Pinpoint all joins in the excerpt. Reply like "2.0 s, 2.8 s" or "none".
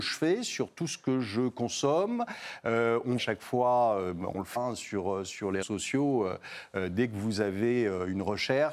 3.2 s, 4.6 s, 5.6 s

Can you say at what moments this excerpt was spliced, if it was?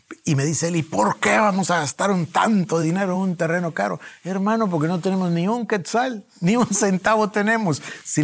none

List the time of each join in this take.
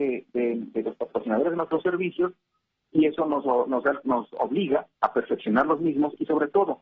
4.9 s

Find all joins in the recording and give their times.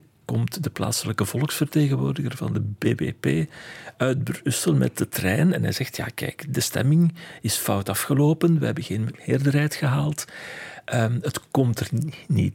none

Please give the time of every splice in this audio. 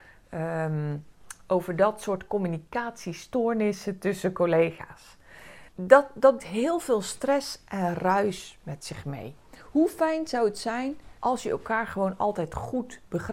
5.7 s, 6.4 s, 11.2 s

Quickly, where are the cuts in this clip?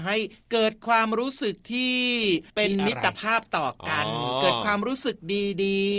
2.5 s

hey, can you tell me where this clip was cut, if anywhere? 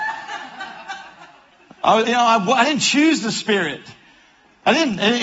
2.1 s

